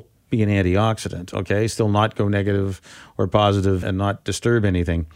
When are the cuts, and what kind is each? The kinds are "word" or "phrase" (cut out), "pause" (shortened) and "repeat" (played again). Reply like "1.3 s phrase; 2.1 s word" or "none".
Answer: 3.8 s word